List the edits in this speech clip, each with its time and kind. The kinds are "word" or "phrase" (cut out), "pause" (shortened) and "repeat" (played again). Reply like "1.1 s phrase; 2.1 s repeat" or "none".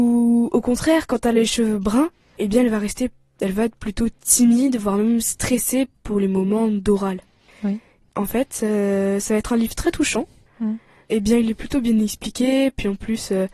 none